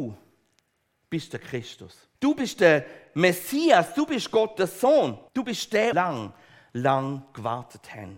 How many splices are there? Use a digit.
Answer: 3